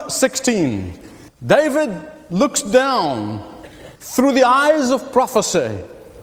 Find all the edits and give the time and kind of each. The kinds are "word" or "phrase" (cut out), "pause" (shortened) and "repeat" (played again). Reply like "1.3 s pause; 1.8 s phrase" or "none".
1.3 s pause; 4.0 s pause